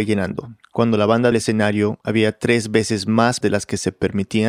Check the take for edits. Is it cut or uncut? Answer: cut